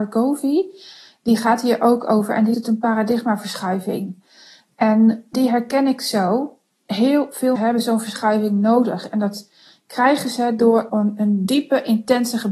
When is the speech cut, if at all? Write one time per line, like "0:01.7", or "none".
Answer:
0:02.5
0:05.3
0:07.6
0:10.9